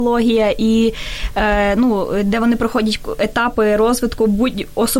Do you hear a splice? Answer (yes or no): no